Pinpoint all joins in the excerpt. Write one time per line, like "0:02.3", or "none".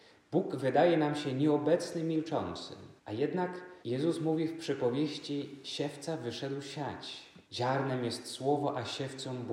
0:03.0
0:03.8
0:07.4